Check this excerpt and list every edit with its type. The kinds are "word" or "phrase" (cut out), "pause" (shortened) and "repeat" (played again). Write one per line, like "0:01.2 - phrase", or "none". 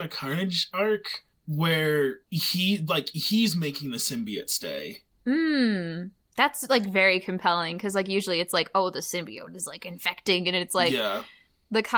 0:02.3 - pause